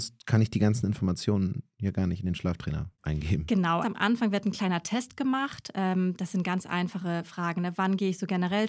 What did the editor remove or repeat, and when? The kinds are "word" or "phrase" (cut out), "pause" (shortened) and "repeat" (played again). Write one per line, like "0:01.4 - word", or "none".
0:02.9 - pause
0:03.8 - phrase